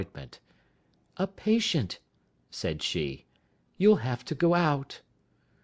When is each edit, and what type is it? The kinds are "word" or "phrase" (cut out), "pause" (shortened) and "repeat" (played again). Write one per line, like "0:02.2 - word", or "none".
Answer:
none